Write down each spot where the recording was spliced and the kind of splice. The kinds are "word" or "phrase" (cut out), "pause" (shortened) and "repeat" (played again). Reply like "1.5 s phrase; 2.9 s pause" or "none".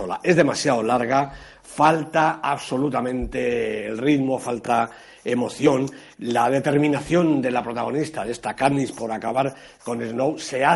none